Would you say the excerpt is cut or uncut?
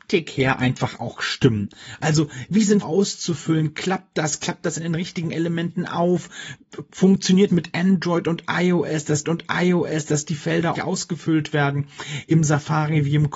cut